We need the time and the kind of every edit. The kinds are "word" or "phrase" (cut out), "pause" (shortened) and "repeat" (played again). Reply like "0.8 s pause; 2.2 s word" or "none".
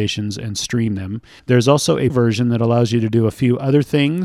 1.4 s pause; 2.1 s word

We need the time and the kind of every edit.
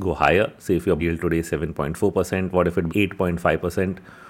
1.0 s word; 2.9 s word

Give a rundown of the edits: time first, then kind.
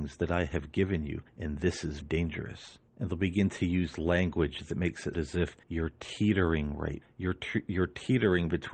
1.3 s pause; 2.0 s word; 2.9 s pause; 5.1 s word; 5.6 s pause; 7.0 s word

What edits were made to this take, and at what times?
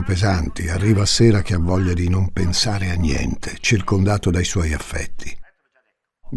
none

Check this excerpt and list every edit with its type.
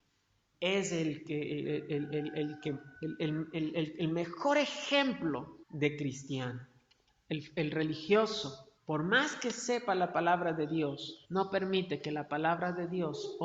3.0 s pause; 5.6 s pause; 7.1 s pause; 8.8 s pause; 11.2 s pause

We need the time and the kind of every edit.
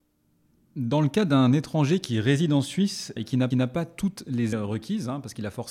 3.2 s word; 3.5 s repeat; 4.5 s word

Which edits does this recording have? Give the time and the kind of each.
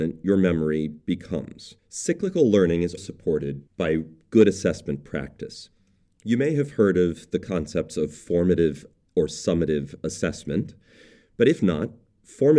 1.8 s pause; 3.0 s word; 3.7 s pause

